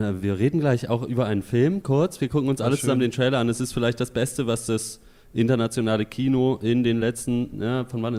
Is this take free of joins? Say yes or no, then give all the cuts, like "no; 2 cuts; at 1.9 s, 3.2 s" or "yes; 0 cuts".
yes; 0 cuts